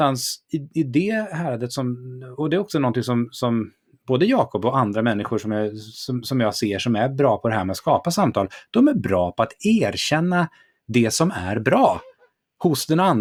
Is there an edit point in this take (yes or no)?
no